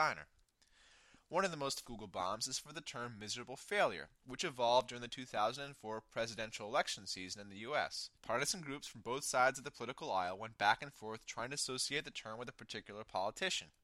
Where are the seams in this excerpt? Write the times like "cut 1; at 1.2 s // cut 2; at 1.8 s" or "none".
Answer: cut 1; at 1.8 s // cut 2; at 8.1 s